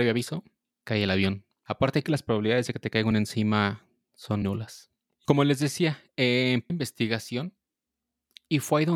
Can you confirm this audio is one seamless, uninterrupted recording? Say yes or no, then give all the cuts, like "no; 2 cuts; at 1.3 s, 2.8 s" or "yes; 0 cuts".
no; 5 cuts; at 2.0 s, 3.1 s, 4.4 s, 5.3 s, 6.7 s